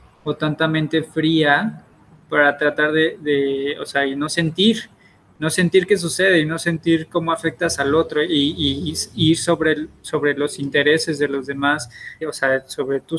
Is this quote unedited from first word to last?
no; 1 cut; at 12.2 s

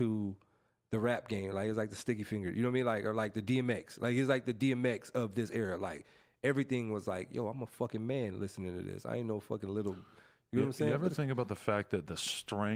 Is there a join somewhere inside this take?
no; 0 cuts

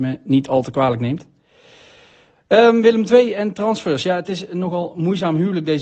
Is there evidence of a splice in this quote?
no; 0 cuts

